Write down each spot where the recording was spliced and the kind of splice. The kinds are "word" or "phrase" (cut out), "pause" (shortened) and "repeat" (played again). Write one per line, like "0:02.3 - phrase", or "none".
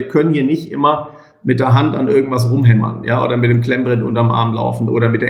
none

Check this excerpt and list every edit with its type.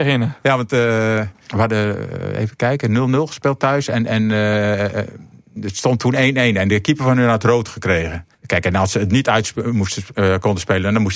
0:08.3 - pause

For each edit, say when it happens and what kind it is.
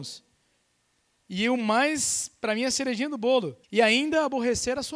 0:03.6 - pause

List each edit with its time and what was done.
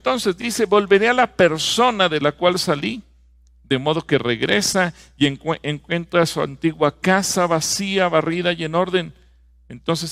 none

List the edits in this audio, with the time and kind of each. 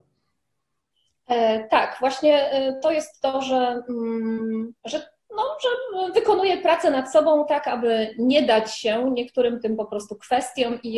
0:04.8 - pause

